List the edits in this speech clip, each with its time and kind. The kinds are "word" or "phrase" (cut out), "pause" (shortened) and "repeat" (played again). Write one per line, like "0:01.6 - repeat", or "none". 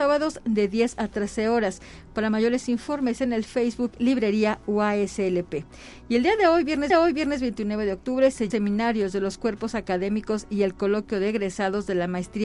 0:06.9 - repeat
0:08.5 - phrase